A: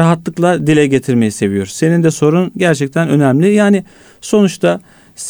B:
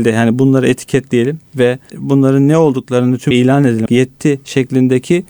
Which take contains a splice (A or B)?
B